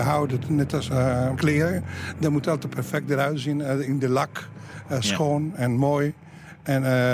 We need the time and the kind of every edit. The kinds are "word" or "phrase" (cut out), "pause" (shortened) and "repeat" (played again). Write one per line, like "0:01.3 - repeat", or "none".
0:01.3 - word